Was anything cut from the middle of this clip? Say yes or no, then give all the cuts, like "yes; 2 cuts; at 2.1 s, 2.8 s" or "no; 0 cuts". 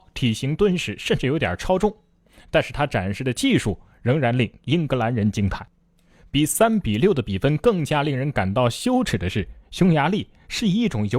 no; 0 cuts